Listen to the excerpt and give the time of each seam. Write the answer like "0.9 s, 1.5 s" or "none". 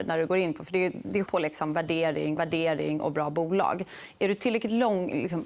1.3 s, 2.4 s